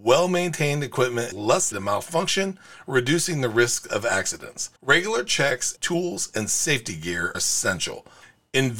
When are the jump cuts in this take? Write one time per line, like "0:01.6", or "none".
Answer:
0:01.3
0:01.7
0:04.8
0:05.8
0:07.3